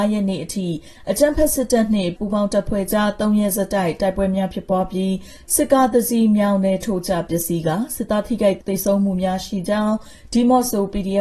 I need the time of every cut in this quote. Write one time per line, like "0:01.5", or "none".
0:02.2